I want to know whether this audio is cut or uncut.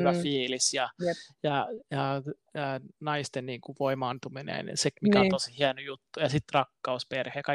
uncut